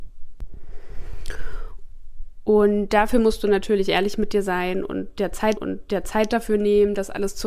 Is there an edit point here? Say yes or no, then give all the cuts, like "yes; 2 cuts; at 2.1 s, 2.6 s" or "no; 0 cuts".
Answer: yes; 1 cut; at 5.6 s